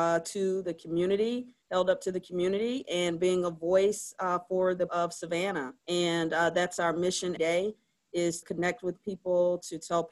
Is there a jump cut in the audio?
yes; 5 cuts; at 1.6 s, 4.9 s, 5.8 s, 7.4 s, 8.4 s

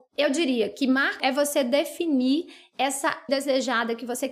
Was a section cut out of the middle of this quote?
yes; 2 cuts; at 1.2 s, 3.3 s

